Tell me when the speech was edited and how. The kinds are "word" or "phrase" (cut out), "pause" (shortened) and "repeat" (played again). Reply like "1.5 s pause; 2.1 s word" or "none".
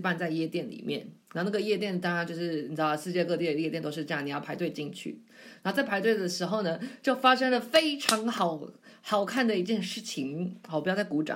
1.2 s pause